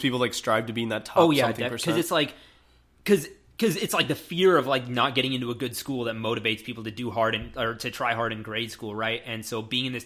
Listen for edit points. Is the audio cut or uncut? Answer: uncut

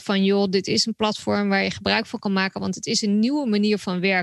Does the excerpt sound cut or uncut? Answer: uncut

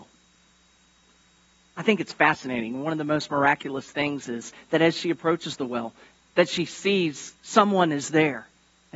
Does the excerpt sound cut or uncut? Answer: uncut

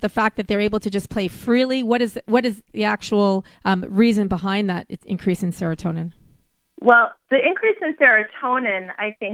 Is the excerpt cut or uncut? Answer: cut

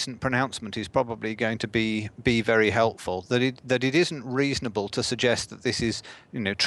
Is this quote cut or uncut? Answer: cut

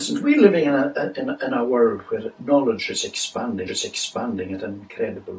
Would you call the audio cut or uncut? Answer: cut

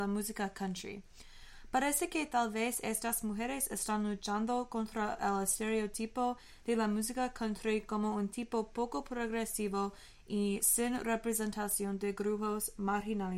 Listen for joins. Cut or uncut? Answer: uncut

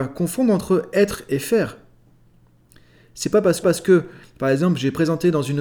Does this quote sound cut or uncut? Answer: cut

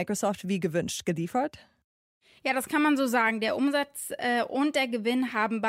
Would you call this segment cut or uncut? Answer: uncut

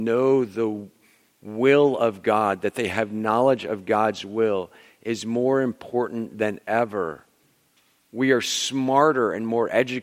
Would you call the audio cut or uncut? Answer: uncut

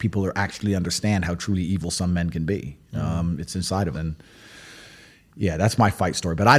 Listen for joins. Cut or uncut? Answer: cut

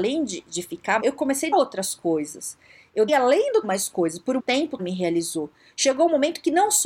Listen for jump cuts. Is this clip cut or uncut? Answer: cut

